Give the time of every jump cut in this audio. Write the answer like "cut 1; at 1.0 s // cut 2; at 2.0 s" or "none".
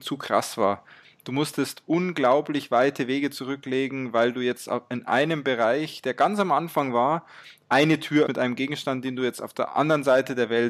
cut 1; at 8.3 s